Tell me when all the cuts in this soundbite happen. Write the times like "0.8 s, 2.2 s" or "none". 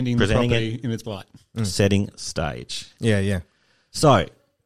1.0 s, 2.1 s